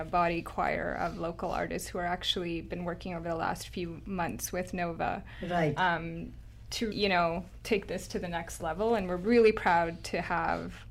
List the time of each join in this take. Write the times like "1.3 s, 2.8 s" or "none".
6.9 s